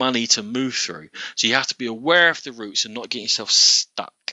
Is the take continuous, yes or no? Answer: yes